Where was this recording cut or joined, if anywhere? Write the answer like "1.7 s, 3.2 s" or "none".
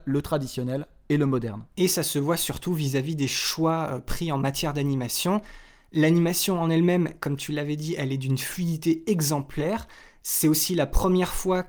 none